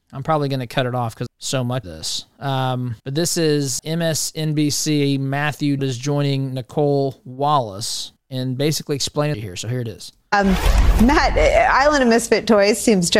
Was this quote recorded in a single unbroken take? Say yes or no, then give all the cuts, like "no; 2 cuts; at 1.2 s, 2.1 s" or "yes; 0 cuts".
no; 7 cuts; at 1.3 s, 1.8 s, 3.0 s, 3.8 s, 5.8 s, 8.2 s, 9.3 s